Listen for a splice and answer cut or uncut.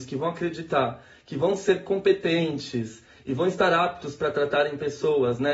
uncut